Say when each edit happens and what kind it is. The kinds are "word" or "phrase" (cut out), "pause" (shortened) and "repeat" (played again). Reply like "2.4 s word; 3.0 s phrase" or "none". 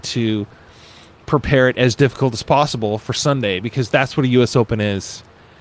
none